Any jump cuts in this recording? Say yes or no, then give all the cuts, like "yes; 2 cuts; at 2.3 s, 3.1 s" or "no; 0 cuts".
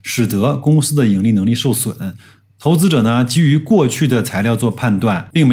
no; 0 cuts